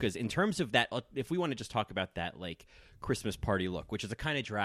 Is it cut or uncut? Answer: uncut